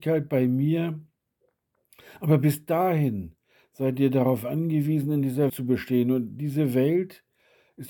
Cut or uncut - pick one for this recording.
cut